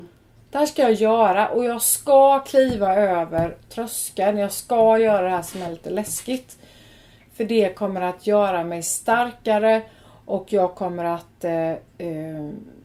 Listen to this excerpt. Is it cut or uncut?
uncut